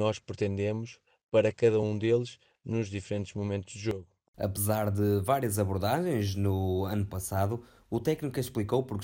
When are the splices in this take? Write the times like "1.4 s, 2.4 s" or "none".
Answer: none

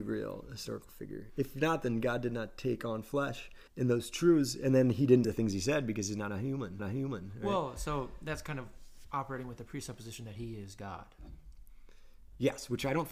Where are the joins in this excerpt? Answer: 3.7 s, 5.2 s, 6.8 s

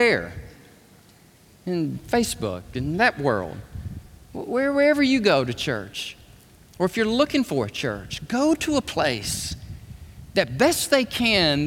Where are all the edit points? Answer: none

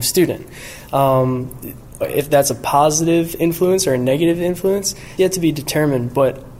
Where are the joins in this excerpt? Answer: 2.0 s, 5.2 s

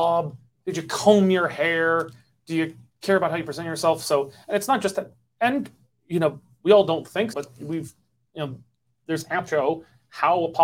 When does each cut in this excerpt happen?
7.3 s, 9.5 s

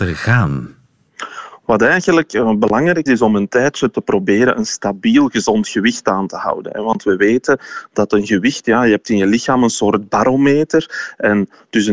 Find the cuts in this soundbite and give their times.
3.1 s

